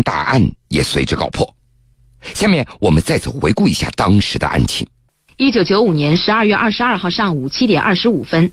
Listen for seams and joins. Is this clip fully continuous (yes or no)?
yes